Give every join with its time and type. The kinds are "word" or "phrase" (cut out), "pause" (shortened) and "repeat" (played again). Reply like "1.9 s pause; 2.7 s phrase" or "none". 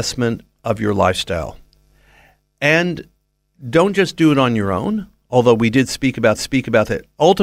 6.4 s repeat